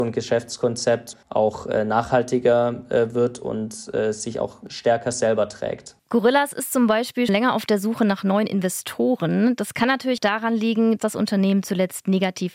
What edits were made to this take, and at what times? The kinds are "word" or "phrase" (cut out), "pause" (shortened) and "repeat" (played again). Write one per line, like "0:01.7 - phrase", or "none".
0:01.2 - pause
0:07.3 - word
0:10.2 - word
0:11.0 - word